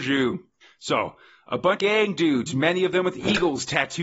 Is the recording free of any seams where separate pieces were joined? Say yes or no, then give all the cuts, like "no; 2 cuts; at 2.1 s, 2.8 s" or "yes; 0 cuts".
no; 1 cut; at 1.8 s